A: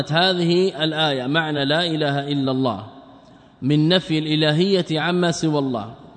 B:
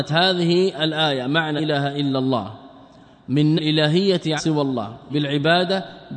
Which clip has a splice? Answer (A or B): B